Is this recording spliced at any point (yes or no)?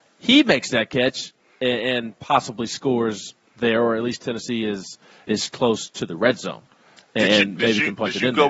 no